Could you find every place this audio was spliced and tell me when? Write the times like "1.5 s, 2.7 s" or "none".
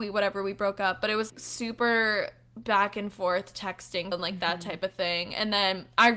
1.3 s, 4.1 s